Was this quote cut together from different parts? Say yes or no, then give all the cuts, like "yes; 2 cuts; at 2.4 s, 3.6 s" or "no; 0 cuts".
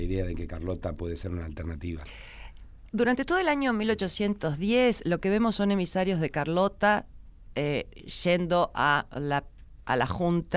no; 0 cuts